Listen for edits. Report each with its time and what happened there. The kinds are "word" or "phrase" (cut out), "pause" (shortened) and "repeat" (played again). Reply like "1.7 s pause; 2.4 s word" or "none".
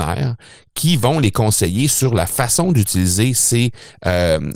none